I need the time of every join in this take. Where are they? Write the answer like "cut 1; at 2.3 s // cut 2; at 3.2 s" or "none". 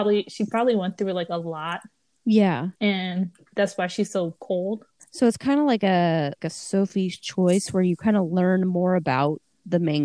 cut 1; at 2.8 s // cut 2; at 5.0 s // cut 3; at 6.4 s